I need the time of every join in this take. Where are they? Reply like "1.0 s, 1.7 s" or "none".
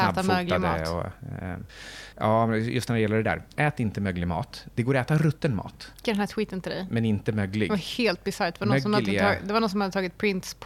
6.0 s

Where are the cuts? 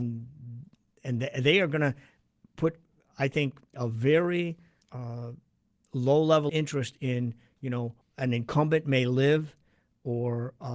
3.7 s, 4.8 s, 6.5 s, 8.0 s

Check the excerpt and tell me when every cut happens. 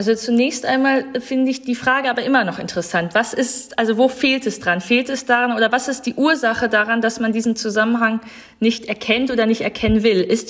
none

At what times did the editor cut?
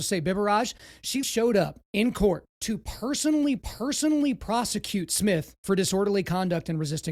1.2 s, 2.5 s, 3.6 s

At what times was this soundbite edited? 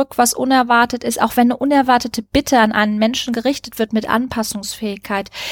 none

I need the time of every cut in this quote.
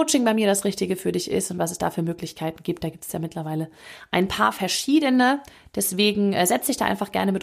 none

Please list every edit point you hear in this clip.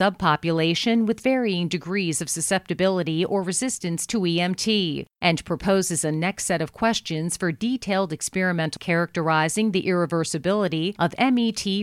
8.8 s

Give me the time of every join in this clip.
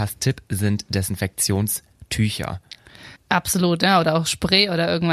3.2 s

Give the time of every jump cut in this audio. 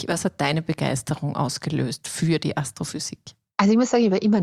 none

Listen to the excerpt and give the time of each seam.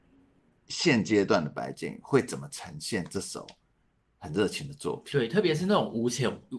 none

